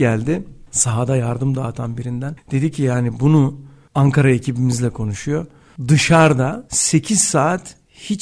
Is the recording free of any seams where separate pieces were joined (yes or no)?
yes